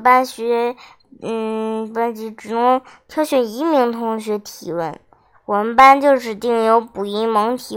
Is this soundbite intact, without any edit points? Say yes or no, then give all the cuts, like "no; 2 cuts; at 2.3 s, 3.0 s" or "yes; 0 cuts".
yes; 0 cuts